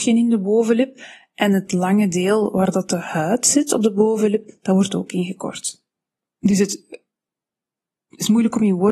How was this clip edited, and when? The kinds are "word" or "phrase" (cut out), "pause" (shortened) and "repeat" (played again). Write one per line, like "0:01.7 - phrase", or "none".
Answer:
none